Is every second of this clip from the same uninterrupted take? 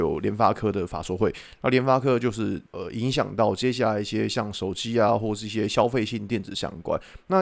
no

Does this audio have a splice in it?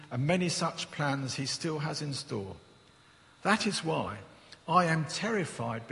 no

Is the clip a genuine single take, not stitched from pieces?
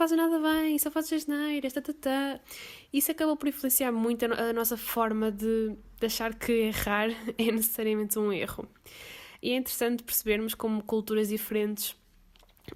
yes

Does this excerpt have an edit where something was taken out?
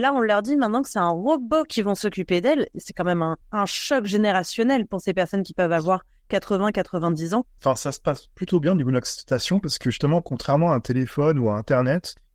yes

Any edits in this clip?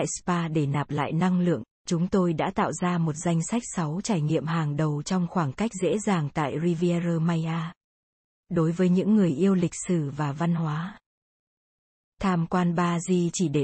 no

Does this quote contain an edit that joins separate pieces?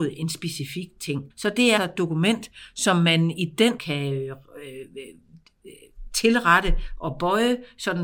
yes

